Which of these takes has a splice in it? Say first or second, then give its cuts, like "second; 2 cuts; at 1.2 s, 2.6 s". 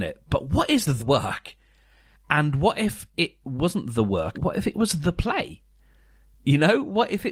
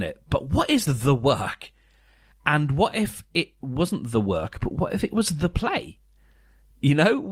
first; 2 cuts; at 1.0 s, 4.3 s